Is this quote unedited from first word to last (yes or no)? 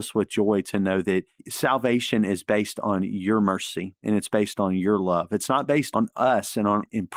no